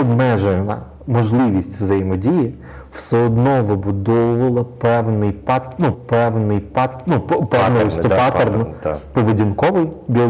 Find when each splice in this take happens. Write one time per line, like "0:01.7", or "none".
0:05.9